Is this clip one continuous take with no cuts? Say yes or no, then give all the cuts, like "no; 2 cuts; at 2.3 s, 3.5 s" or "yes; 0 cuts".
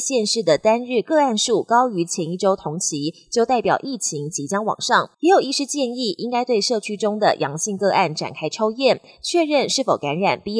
no; 1 cut; at 5.1 s